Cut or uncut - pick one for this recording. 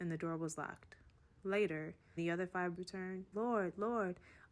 cut